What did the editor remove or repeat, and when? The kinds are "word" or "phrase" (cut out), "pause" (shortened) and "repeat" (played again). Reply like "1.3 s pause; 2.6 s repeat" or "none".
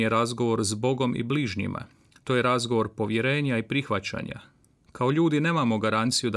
none